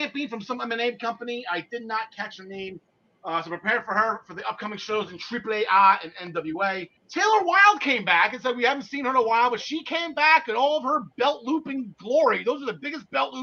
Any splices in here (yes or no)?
yes